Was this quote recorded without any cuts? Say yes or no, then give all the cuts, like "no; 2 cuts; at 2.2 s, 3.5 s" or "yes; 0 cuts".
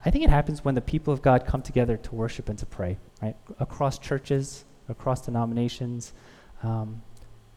no; 1 cut; at 3.1 s